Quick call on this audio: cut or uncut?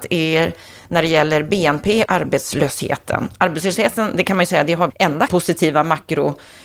cut